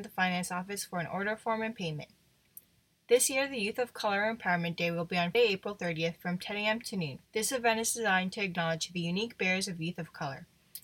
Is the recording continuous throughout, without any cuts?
no; 2 cuts; at 5.3 s, 7.2 s

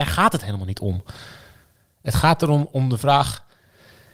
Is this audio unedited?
yes; 0 cuts

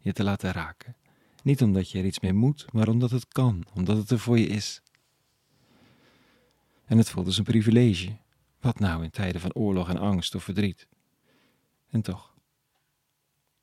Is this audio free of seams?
yes; 0 cuts

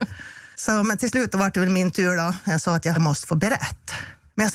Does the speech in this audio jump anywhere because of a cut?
yes; 1 cut; at 2.9 s

